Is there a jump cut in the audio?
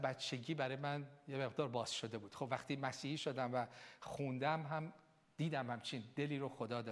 no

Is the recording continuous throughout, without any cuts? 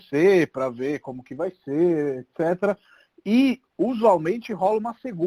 yes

